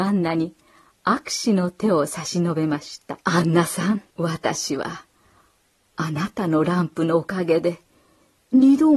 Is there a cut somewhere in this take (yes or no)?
yes